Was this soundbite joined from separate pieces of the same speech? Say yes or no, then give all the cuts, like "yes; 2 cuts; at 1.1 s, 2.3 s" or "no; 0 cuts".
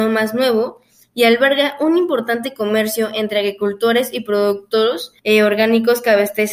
yes; 1 cut; at 5.2 s